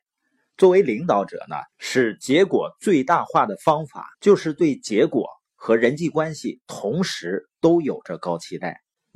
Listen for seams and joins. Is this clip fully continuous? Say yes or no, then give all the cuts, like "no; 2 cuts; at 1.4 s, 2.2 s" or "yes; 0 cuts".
no; 2 cuts; at 1.7 s, 4.1 s